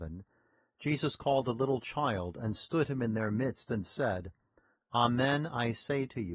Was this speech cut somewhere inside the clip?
no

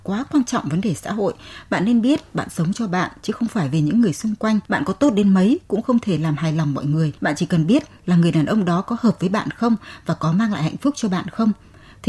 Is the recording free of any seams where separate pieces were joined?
no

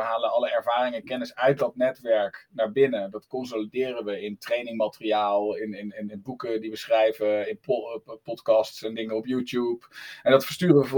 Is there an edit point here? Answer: no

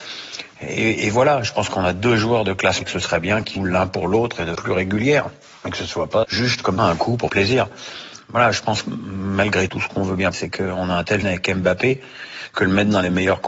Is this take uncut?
no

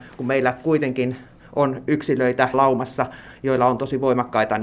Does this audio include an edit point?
yes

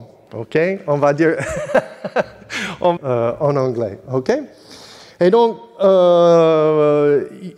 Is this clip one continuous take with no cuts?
no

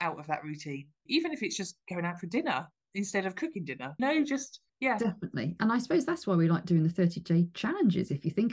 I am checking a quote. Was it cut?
yes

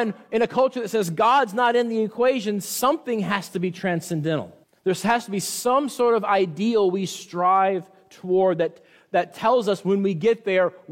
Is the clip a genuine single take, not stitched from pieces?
no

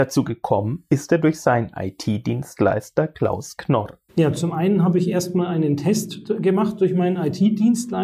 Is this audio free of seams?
no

